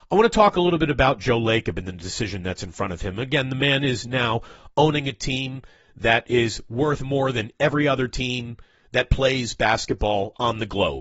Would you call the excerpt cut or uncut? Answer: uncut